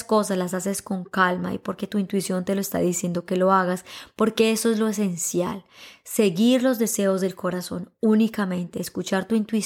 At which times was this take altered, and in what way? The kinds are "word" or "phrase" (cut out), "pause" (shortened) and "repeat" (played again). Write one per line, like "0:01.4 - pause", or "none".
none